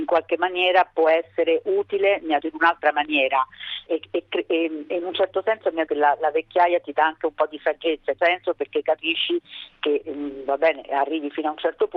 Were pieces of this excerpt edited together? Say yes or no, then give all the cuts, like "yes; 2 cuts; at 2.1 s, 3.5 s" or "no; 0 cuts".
yes; 4 cuts; at 2.4 s, 3.9 s, 5.9 s, 8.2 s